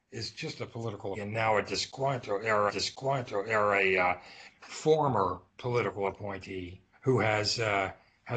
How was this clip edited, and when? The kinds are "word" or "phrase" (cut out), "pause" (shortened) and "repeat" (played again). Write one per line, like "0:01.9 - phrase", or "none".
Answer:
0:01.1 - word
0:02.7 - repeat
0:04.5 - word
0:05.5 - pause
0:06.9 - pause